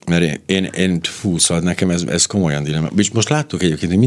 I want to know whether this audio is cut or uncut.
uncut